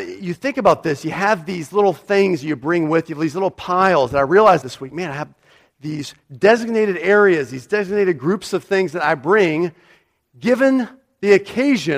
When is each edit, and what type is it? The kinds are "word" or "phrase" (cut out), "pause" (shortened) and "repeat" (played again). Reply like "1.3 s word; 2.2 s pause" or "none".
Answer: 4.6 s word